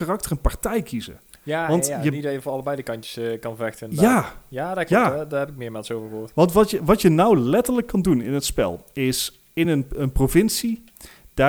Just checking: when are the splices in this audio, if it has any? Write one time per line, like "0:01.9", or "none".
none